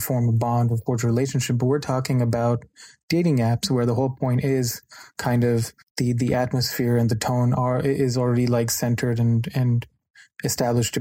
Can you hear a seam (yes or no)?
yes